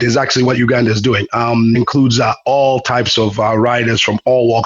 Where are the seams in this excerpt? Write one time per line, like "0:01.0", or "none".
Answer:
0:01.7